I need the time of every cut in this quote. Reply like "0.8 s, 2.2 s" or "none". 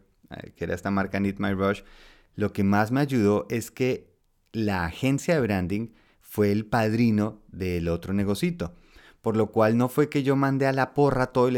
none

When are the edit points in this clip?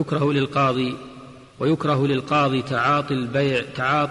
1.5 s

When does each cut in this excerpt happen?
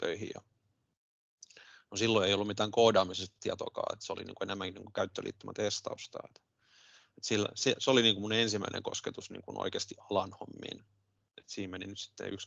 none

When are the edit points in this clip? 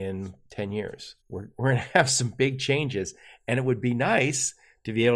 1.2 s

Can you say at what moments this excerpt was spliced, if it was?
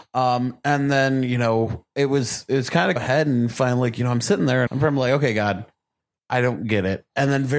3.0 s, 4.7 s

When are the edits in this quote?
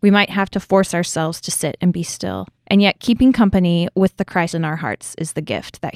2.6 s, 4.5 s

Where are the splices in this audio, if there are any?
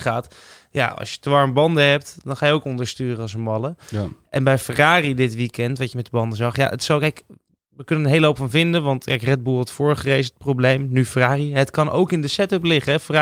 none

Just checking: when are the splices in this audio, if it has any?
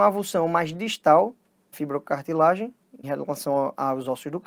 1.7 s, 3.0 s

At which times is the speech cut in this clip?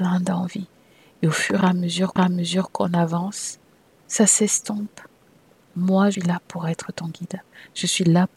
2.2 s, 6.1 s

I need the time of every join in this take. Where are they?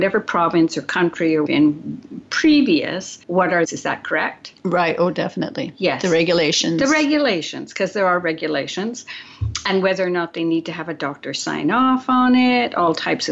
1.5 s, 3.2 s, 3.6 s

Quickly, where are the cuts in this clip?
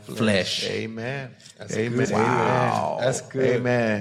2.0 s

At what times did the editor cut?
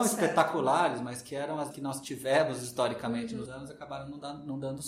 1.7 s, 3.5 s

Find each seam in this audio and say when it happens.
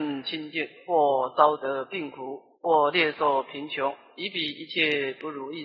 2.6 s

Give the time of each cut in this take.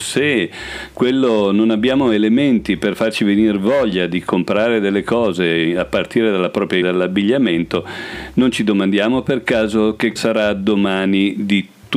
6.8 s, 10.2 s

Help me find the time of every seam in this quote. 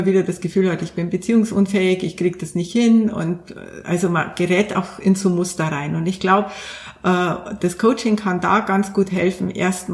none

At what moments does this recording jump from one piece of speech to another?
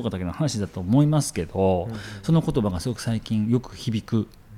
none

